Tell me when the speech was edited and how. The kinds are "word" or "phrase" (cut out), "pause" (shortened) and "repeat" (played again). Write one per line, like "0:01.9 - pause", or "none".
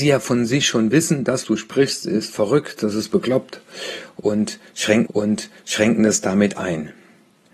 0:01.4 - word
0:05.1 - repeat